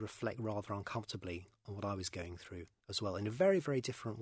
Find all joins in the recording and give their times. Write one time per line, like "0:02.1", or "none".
none